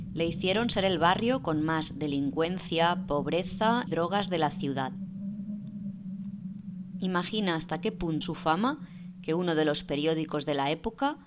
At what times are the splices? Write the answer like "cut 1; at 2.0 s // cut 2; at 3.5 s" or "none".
cut 1; at 3.9 s // cut 2; at 8.2 s